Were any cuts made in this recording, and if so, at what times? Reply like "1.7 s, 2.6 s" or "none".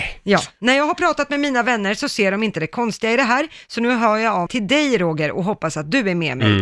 4.5 s